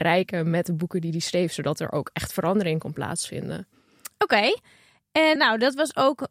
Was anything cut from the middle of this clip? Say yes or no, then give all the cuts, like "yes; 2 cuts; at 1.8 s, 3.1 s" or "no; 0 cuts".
yes; 1 cut; at 5.4 s